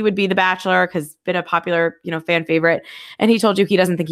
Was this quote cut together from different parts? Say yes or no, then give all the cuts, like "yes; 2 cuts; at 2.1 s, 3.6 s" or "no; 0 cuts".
yes; 1 cut; at 1.2 s